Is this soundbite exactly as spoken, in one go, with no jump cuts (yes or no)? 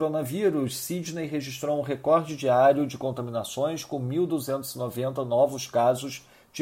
yes